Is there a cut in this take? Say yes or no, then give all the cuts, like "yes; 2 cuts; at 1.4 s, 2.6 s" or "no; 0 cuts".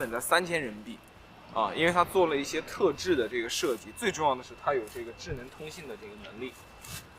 no; 0 cuts